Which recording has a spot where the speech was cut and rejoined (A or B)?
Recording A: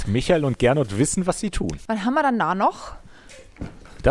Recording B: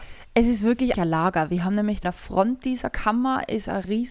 B